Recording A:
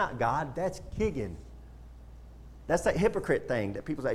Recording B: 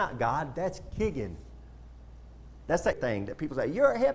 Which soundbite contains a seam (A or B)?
B